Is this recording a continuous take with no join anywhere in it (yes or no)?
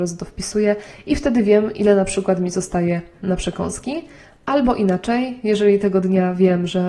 yes